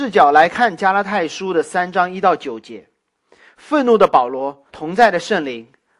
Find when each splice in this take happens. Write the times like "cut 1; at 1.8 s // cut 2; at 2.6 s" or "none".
cut 1; at 4.7 s